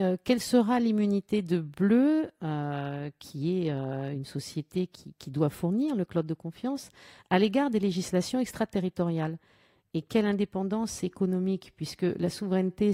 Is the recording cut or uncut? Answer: uncut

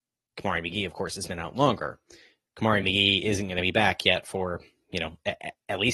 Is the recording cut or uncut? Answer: uncut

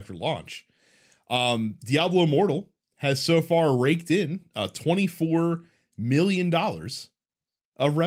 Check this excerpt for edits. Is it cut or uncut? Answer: uncut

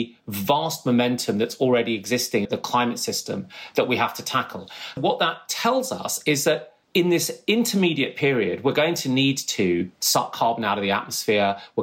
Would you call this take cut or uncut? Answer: cut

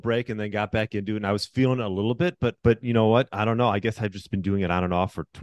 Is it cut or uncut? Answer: cut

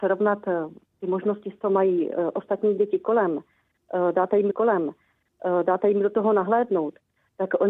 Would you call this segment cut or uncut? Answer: cut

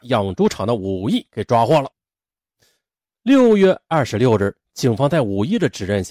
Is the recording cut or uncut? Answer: uncut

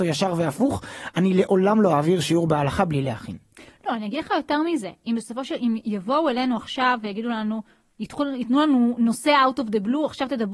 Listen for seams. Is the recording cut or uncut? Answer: cut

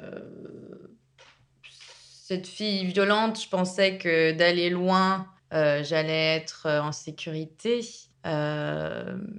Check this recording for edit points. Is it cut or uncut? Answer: cut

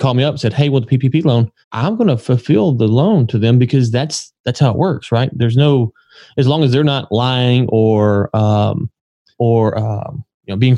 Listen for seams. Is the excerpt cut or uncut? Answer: cut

